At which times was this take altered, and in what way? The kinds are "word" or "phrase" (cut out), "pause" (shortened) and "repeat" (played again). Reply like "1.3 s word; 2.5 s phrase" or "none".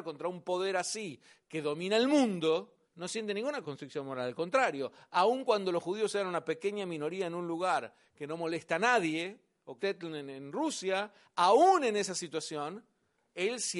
2.9 s pause; 3.6 s word; 9.8 s phrase